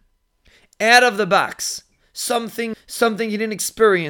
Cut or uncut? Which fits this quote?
cut